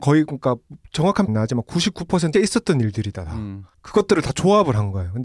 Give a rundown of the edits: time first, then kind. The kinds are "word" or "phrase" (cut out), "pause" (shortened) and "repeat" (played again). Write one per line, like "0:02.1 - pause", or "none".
0:01.3 - phrase
0:02.3 - word